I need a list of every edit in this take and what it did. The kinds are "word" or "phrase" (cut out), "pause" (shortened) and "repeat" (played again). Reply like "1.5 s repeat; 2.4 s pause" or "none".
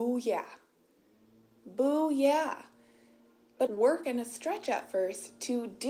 3.7 s phrase